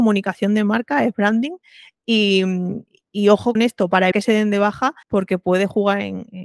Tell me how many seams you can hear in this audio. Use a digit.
3